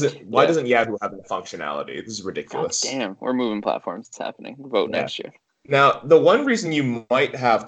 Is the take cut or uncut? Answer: uncut